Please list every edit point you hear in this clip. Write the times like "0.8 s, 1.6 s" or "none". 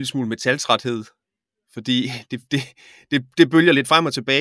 none